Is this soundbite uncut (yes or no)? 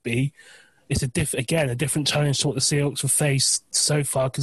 yes